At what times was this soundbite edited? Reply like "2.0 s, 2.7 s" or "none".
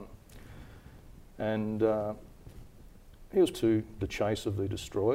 3.5 s, 4.0 s